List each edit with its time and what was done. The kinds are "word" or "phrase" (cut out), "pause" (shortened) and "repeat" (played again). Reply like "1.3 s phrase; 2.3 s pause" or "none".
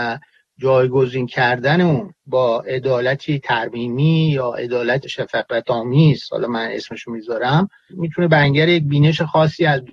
2.2 s pause